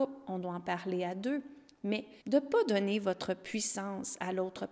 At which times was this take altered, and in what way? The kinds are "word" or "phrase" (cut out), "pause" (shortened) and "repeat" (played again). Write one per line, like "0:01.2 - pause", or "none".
0:02.2 - pause